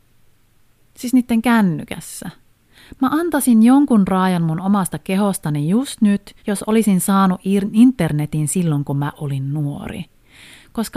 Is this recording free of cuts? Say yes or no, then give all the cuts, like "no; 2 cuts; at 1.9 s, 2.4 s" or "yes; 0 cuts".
no; 1 cut; at 6.4 s